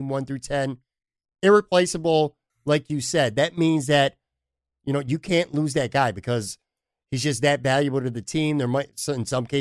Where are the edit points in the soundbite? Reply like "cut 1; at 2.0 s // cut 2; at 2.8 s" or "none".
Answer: none

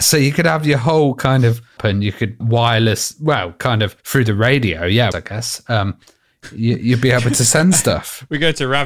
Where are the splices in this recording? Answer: cut 1; at 1.8 s // cut 2; at 2.4 s // cut 3; at 4.0 s // cut 4; at 5.1 s

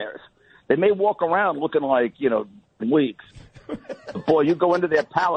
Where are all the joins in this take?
cut 1; at 2.8 s

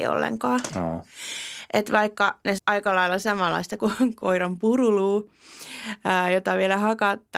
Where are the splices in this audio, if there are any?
cut 1; at 2.6 s // cut 2; at 3.8 s

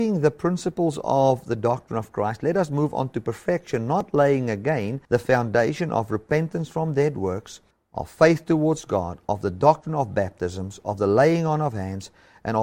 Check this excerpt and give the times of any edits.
cut 1; at 5.0 s // cut 2; at 7.7 s

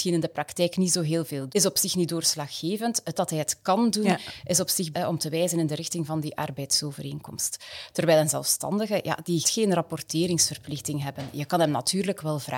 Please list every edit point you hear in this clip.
cut 1; at 1.5 s // cut 2; at 3.1 s // cut 3; at 4.9 s // cut 4; at 9.4 s

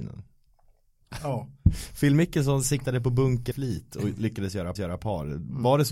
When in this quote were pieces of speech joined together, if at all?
cut 1; at 3.5 s // cut 2; at 4.8 s

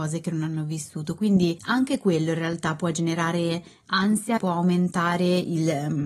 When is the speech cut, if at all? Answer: cut 1; at 4.4 s

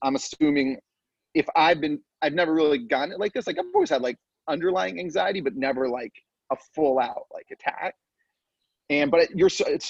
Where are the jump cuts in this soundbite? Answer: none

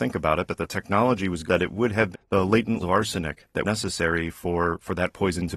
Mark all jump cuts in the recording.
cut 1; at 1.5 s // cut 2; at 2.1 s // cut 3; at 2.8 s // cut 4; at 3.6 s

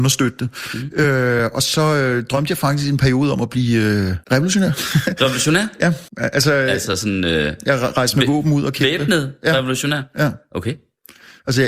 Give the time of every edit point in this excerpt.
cut 1; at 4.2 s // cut 2; at 6.1 s

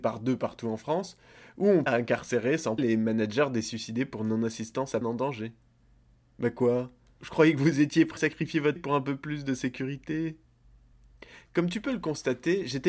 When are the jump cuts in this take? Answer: cut 1; at 1.9 s // cut 2; at 2.8 s // cut 3; at 5.0 s // cut 4; at 7.2 s // cut 5; at 8.2 s // cut 6; at 8.8 s

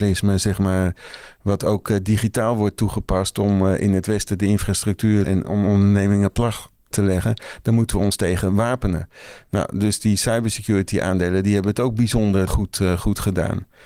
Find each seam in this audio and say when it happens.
cut 1; at 5.2 s // cut 2; at 6.9 s // cut 3; at 12.5 s

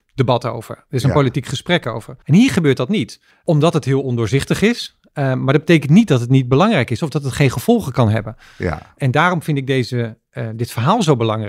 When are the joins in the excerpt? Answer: cut 1; at 2.2 s // cut 2; at 3.3 s

